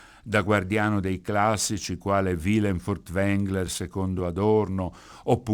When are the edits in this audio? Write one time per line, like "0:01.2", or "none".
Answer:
none